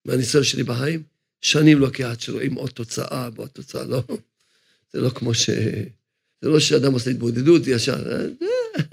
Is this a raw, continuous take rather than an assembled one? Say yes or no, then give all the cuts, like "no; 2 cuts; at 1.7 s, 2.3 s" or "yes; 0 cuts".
yes; 0 cuts